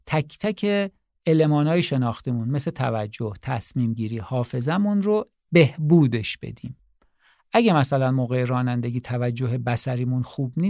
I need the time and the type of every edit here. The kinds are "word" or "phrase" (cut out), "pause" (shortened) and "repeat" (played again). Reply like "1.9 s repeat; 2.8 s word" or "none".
none